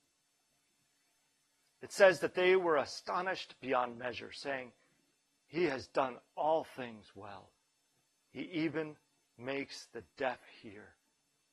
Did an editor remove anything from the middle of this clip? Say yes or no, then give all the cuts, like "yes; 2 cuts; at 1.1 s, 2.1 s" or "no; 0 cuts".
no; 0 cuts